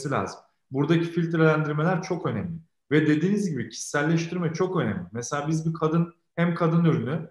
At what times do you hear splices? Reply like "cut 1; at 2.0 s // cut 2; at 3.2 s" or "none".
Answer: none